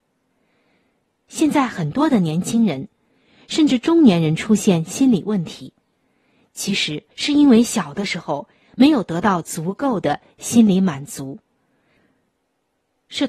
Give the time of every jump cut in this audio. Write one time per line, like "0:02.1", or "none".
0:07.1